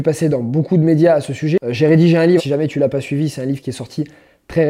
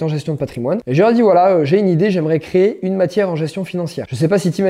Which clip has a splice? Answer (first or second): first